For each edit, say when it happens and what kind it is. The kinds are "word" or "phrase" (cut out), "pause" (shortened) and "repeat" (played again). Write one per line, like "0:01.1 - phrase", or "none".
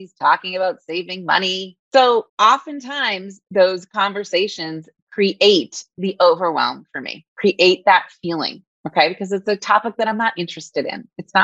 0:02.3 - pause